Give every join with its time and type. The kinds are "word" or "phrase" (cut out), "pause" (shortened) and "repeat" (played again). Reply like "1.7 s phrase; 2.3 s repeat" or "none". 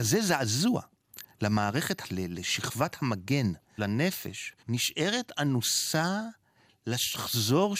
2.0 s word; 3.8 s word; 4.6 s word